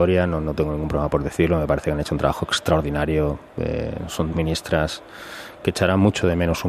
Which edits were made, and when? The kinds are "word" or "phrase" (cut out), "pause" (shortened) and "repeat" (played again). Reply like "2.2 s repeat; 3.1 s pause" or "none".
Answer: 4.3 s word